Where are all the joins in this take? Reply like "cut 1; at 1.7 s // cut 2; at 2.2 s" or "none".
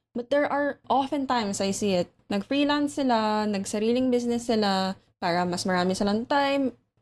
none